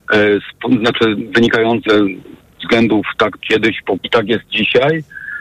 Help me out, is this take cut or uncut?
cut